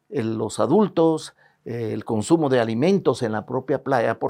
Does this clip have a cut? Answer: no; 0 cuts

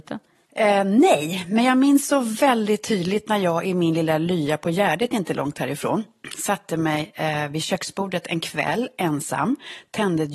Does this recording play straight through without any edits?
yes; 0 cuts

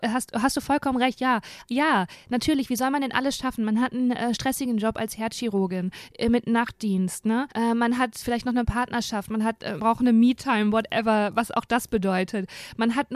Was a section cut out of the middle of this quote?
yes; 3 cuts; at 7.5 s, 8.2 s, 9.8 s

